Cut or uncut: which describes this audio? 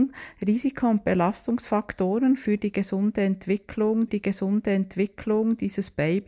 cut